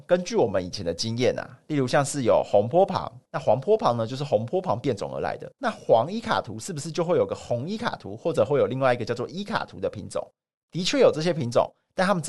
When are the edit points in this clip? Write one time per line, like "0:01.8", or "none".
0:03.2
0:05.5